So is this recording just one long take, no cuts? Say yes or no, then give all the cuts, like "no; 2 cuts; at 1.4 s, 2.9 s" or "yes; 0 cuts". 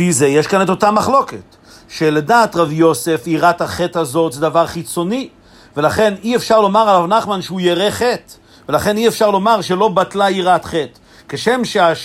yes; 0 cuts